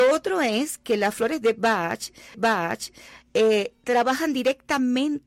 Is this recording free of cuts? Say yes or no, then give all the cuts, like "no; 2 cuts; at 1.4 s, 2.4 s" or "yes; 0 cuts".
no; 1 cut; at 2.3 s